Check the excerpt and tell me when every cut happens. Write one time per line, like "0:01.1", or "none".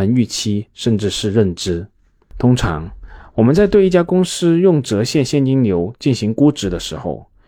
none